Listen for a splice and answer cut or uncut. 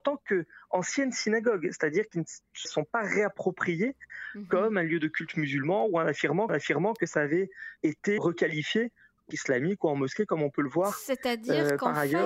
cut